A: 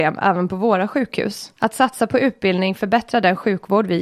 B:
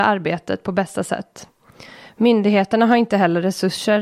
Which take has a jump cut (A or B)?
A